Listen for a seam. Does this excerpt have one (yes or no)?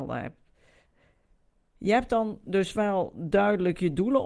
no